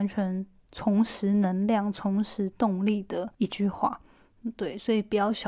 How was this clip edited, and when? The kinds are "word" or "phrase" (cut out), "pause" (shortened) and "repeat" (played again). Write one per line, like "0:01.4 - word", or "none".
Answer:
0:03.3 - pause